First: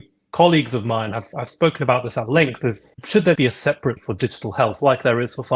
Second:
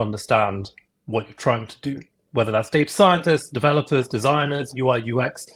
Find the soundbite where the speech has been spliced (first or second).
first